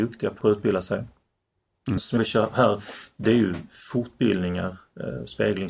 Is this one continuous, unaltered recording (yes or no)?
no